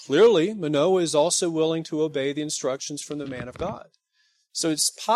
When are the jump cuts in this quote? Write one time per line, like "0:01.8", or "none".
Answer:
none